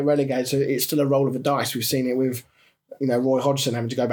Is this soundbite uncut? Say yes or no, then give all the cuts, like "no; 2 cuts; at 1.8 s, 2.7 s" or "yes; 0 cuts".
yes; 0 cuts